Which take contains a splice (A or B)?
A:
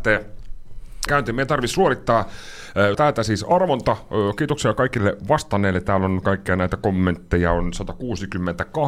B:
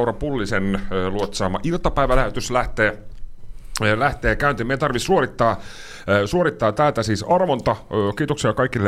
A